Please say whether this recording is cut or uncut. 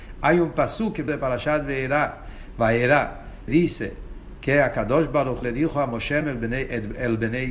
cut